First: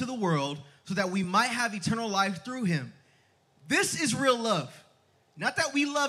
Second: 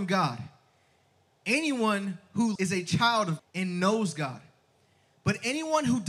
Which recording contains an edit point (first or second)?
second